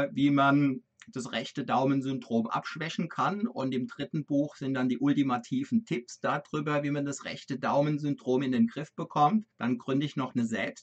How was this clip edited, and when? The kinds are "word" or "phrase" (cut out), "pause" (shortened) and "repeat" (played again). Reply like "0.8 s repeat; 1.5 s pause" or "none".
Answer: 9.5 s pause